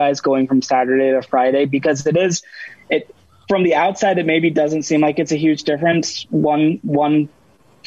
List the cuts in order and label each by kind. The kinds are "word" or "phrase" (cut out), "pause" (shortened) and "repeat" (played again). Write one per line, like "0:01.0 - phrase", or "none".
none